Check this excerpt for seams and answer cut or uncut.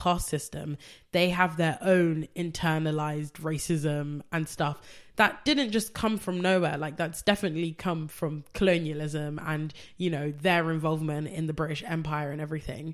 uncut